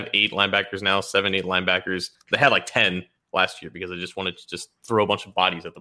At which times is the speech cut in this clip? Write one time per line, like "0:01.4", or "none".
none